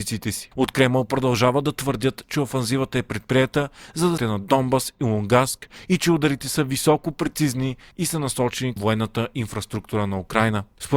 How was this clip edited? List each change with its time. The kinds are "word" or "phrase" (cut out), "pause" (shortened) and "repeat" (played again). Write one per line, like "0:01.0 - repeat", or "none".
0:04.2 - phrase
0:08.8 - word